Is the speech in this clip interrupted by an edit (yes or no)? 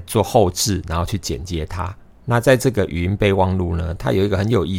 no